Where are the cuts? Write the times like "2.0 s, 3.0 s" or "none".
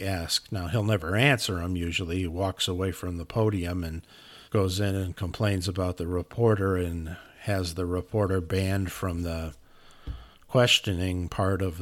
4.5 s